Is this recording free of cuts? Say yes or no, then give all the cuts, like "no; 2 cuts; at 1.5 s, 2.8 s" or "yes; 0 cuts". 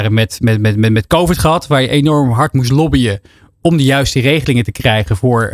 yes; 0 cuts